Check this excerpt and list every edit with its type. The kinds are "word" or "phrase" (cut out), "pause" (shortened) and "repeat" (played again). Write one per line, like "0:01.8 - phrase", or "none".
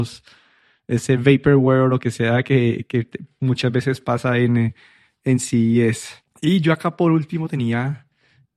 none